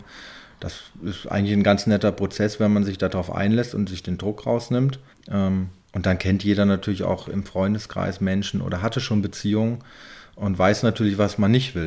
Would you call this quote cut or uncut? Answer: cut